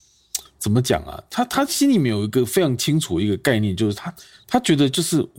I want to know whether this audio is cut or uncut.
uncut